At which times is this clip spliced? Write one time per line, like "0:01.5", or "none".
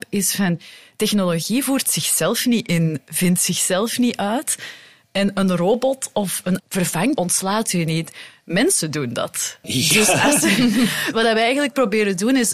0:06.6
0:07.2
0:11.1